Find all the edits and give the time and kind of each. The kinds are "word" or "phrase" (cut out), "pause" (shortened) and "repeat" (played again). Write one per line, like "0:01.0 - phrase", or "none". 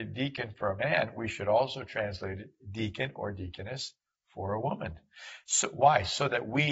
none